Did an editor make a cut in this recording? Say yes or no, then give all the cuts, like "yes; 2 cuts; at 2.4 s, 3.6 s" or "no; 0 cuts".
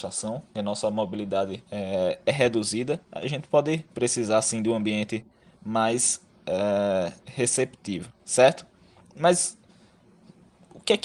yes; 3 cuts; at 1.7 s, 3.9 s, 8.2 s